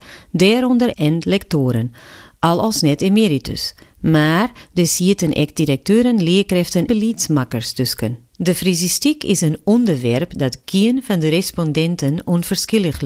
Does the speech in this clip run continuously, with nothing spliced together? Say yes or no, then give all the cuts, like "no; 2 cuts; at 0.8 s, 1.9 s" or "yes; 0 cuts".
no; 2 cuts; at 0.9 s, 6.9 s